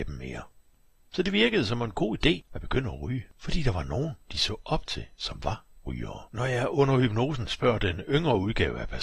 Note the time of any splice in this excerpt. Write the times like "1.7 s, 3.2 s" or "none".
4.2 s, 6.3 s